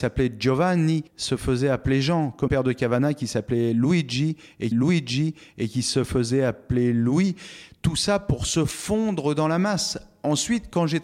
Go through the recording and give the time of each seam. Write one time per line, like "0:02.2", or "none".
0:01.1
0:02.5
0:04.7